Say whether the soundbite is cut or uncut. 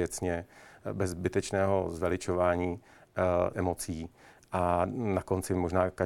cut